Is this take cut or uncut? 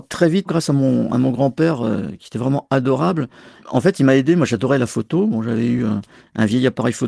uncut